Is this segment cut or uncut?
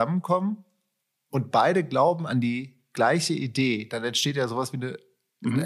uncut